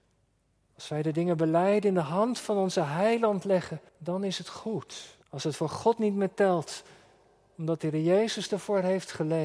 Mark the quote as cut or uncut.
cut